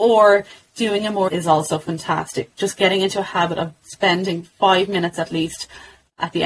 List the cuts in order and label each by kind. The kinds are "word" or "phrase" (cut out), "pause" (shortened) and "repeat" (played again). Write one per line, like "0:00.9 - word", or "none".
0:01.3 - phrase
0:02.5 - word